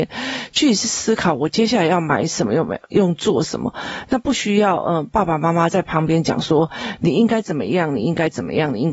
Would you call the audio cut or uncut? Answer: uncut